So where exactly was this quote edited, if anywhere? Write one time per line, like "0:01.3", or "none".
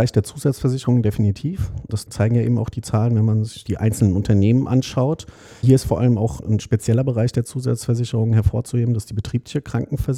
none

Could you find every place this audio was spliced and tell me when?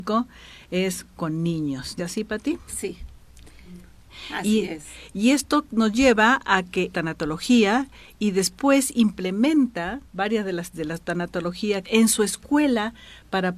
0:02.0
0:06.9
0:10.1
0:10.7
0:11.8

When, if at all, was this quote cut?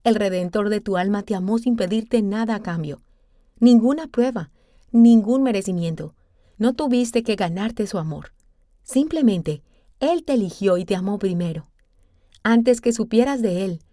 none

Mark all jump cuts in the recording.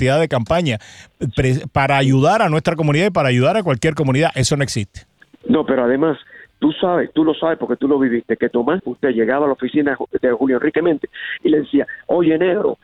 0:08.8

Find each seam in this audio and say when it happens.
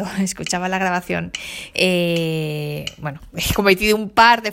0:01.7

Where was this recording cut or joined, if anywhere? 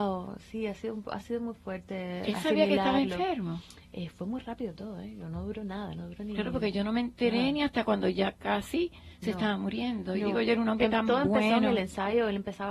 0:03.8

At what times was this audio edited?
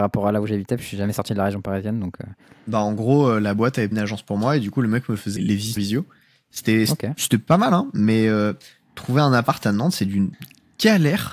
0:03.9
0:05.4
0:05.8

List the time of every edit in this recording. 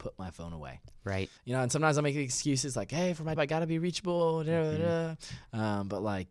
0:01.4
0:03.4

